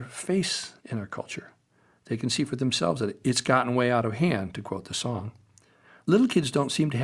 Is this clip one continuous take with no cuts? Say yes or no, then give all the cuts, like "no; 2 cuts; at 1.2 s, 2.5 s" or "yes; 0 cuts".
yes; 0 cuts